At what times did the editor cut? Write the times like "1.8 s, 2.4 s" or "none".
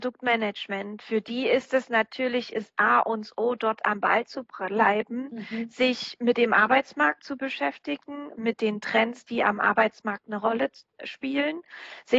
none